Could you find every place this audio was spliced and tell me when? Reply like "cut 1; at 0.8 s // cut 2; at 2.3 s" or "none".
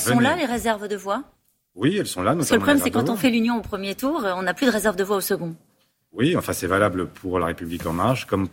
none